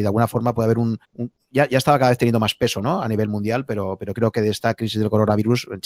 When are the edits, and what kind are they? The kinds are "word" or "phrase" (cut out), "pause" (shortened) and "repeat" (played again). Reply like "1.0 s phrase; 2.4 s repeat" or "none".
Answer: 1.0 s pause